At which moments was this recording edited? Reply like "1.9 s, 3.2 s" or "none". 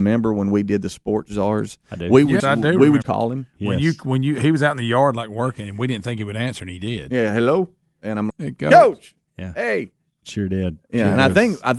2.4 s, 3.0 s, 8.3 s